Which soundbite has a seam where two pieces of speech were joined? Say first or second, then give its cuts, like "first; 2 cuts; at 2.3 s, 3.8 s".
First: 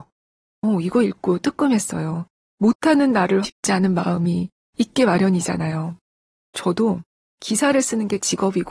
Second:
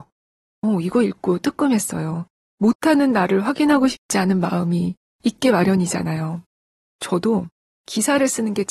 first; 1 cut; at 3.4 s